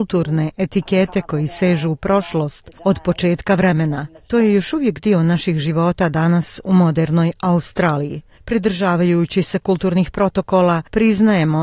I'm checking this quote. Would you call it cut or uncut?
uncut